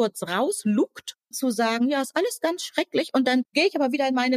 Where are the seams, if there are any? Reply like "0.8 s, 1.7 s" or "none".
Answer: 1.3 s